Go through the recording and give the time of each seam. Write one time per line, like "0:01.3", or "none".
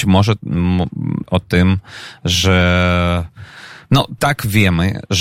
0:01.2
0:04.2